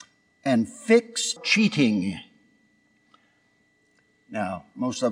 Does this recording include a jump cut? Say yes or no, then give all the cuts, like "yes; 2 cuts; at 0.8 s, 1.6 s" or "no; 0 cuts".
yes; 1 cut; at 1.4 s